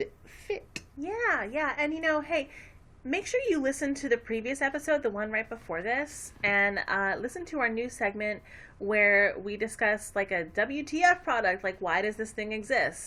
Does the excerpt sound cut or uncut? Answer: uncut